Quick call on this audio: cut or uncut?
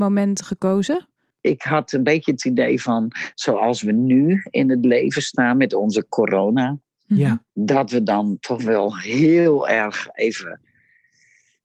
cut